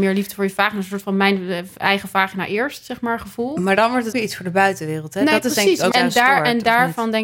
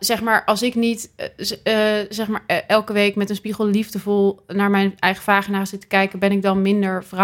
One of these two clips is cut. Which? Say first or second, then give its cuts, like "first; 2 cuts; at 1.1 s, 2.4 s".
first; 2 cuts; at 4.1 s, 5.9 s